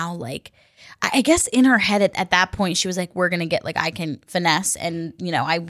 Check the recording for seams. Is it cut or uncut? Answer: uncut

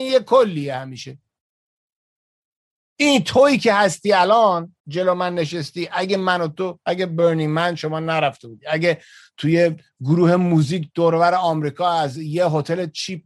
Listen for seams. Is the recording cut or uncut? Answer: cut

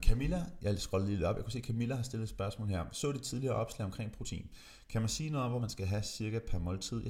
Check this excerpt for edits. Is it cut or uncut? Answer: cut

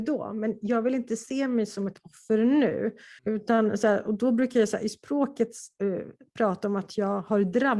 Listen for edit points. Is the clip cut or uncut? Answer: cut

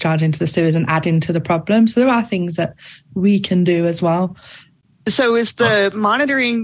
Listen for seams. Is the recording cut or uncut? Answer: uncut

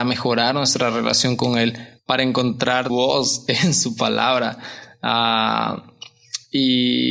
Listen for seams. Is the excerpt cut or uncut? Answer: cut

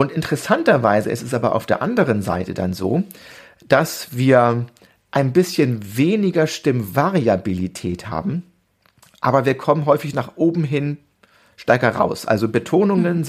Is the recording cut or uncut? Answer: uncut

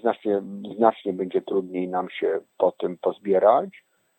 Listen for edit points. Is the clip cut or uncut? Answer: uncut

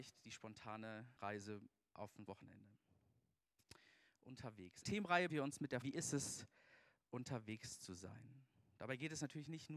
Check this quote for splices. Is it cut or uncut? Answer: cut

